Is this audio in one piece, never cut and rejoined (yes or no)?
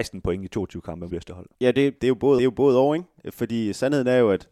no